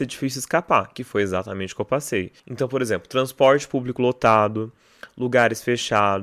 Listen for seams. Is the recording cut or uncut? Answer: cut